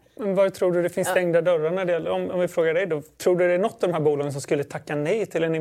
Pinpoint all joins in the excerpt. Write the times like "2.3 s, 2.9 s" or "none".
none